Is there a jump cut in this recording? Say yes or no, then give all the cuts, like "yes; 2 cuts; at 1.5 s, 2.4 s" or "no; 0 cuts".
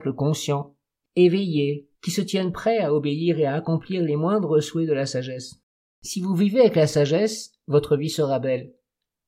yes; 2 cuts; at 1.9 s, 5.8 s